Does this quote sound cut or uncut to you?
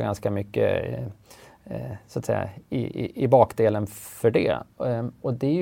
uncut